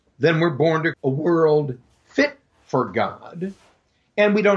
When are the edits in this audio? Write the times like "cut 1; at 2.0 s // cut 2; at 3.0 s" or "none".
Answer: cut 1; at 0.9 s

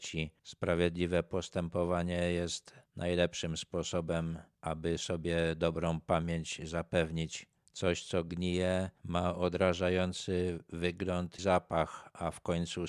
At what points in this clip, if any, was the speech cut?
cut 1; at 11.4 s

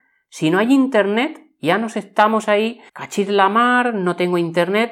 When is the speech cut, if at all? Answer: cut 1; at 2.9 s

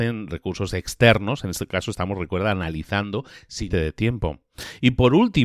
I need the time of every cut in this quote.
cut 1; at 3.7 s

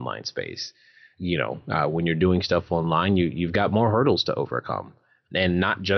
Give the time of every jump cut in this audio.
none

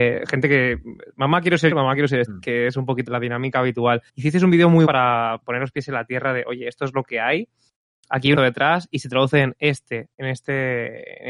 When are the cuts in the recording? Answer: cut 1; at 1.7 s // cut 2; at 2.3 s // cut 3; at 3.1 s // cut 4; at 4.1 s // cut 5; at 4.9 s // cut 6; at 8.3 s

